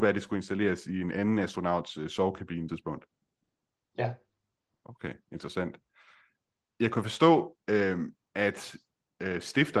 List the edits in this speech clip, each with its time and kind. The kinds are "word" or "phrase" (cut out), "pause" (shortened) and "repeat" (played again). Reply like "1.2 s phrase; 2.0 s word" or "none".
2.7 s phrase

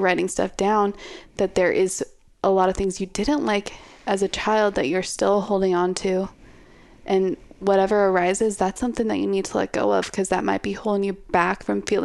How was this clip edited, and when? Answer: none

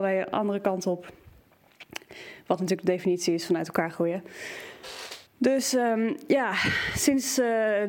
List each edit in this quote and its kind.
5.3 s pause

